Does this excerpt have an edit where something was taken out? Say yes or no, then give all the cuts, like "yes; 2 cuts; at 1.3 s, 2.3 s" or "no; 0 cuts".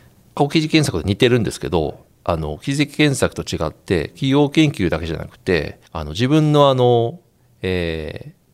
yes; 1 cut; at 5.9 s